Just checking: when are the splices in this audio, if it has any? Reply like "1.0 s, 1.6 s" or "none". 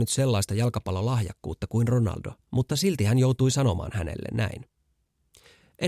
2.4 s